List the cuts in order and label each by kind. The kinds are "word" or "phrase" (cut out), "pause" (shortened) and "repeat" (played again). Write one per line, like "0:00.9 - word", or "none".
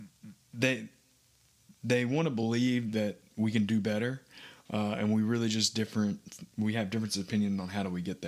none